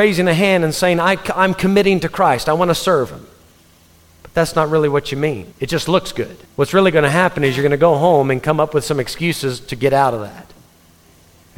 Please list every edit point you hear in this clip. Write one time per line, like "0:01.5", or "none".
0:03.6
0:05.5
0:06.5